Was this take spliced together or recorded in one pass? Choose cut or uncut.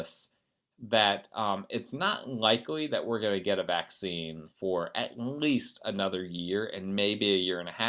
cut